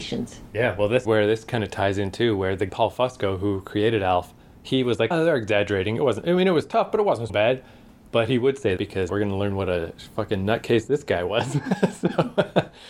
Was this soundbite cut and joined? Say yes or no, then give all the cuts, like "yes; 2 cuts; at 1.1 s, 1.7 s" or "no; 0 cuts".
yes; 6 cuts; at 1.0 s, 2.7 s, 5.1 s, 7.3 s, 8.8 s, 9.1 s